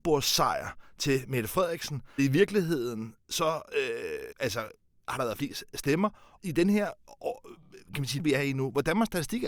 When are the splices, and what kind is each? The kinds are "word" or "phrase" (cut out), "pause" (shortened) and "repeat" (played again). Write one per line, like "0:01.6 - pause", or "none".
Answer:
0:02.2 - word
0:04.3 - word
0:06.4 - word
0:08.2 - word